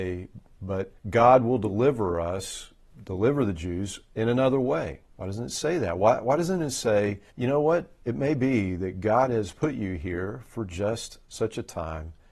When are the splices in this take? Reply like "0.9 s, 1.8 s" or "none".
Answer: 1.0 s, 5.1 s, 7.3 s, 8.0 s, 11.2 s